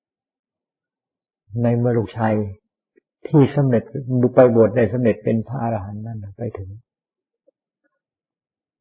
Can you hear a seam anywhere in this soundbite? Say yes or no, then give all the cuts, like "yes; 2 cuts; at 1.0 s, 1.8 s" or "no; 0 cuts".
no; 0 cuts